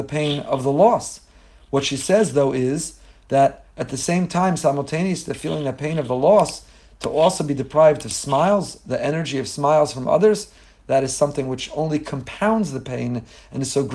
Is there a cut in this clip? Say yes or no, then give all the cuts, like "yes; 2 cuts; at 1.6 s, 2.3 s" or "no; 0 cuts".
no; 0 cuts